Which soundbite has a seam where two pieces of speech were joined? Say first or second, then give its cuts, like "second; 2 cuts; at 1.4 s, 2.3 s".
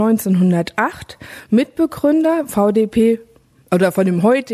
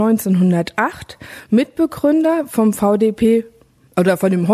first; 1 cut; at 2.5 s